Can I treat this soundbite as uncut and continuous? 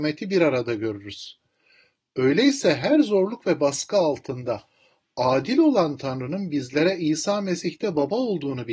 yes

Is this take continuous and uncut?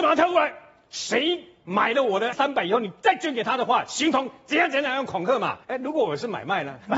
no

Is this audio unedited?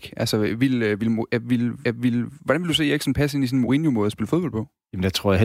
no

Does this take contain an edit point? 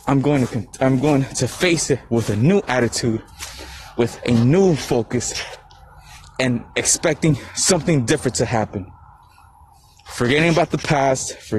no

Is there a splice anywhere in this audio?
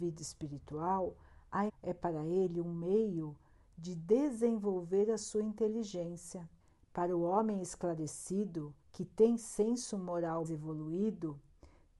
yes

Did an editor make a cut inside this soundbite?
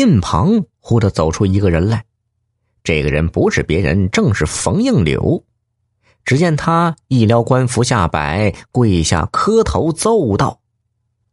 no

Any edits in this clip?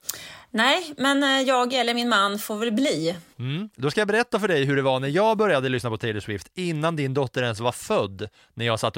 yes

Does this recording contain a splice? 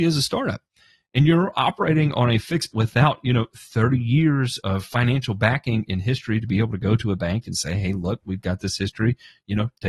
yes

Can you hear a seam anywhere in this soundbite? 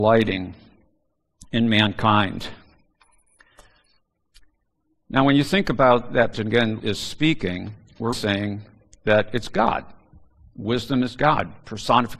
yes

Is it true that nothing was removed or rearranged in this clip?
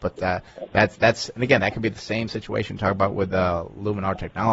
yes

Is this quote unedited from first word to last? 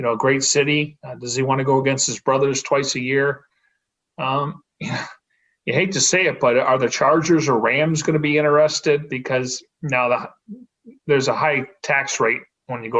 yes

